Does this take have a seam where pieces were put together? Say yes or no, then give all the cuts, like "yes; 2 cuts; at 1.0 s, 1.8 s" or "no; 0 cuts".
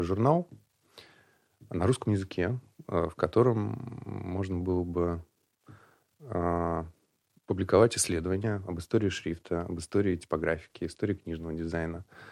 no; 0 cuts